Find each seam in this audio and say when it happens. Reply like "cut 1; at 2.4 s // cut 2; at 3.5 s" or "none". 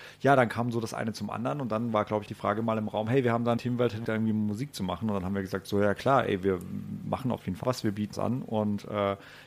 cut 1; at 2.3 s // cut 2; at 3.6 s // cut 3; at 4.0 s // cut 4; at 7.6 s // cut 5; at 8.1 s